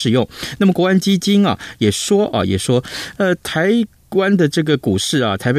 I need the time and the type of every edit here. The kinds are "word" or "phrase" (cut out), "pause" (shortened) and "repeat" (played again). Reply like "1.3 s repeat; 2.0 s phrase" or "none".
none